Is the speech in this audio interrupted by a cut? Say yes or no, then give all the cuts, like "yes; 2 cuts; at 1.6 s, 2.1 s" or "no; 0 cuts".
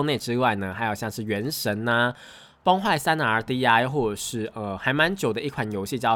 no; 0 cuts